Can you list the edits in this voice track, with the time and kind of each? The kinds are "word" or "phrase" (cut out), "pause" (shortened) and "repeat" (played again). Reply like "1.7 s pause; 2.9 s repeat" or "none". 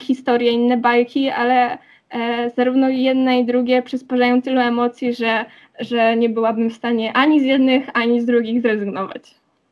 none